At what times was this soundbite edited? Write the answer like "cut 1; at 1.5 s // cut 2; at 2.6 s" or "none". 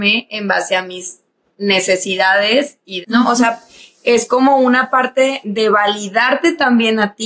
cut 1; at 3.0 s // cut 2; at 5.4 s